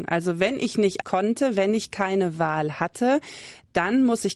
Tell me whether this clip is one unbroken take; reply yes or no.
no